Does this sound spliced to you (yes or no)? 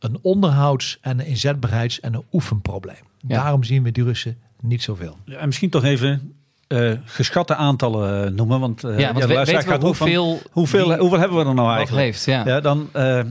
no